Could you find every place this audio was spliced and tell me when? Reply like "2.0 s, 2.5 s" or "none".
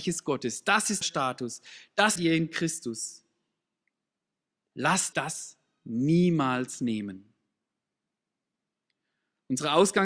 1.0 s, 2.2 s, 5.1 s

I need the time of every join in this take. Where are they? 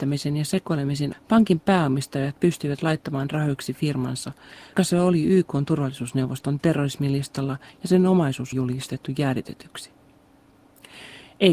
1.1 s, 4.8 s, 8.5 s

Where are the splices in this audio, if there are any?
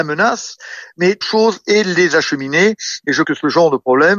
1.2 s, 3.2 s

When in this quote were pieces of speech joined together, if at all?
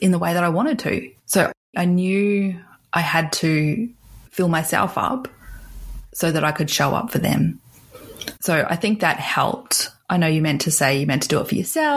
1.2 s, 4.3 s, 8.4 s

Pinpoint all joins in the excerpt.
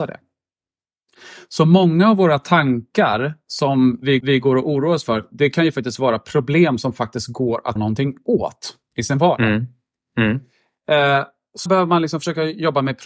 4.2 s, 7.8 s, 11.7 s

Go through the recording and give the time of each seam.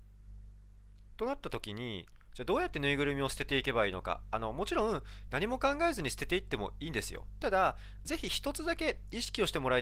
8.0 s

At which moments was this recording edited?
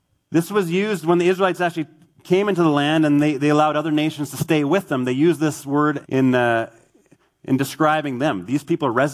6.1 s

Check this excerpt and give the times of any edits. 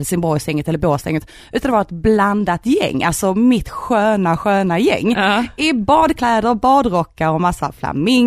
none

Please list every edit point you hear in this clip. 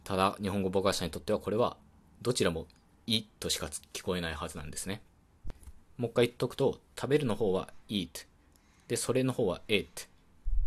none

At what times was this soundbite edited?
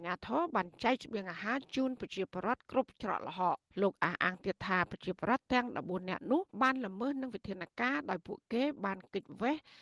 3.7 s, 6.5 s

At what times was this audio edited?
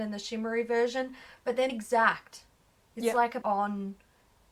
1.7 s, 3.4 s

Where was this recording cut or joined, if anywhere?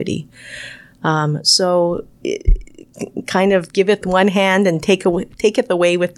2.1 s, 4.0 s

